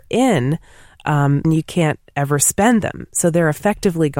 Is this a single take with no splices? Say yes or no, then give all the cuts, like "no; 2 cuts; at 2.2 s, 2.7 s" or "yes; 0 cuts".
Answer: no; 1 cut; at 1.4 s